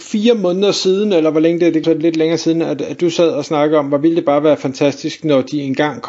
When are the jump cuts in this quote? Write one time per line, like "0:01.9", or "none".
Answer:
0:01.8